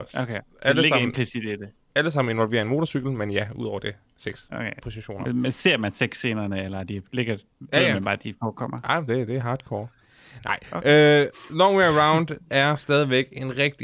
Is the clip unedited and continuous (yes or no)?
yes